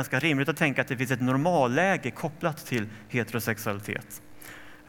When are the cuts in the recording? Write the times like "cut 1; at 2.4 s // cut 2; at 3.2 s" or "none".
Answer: none